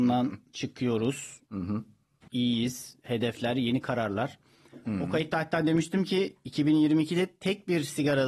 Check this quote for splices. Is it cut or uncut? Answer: cut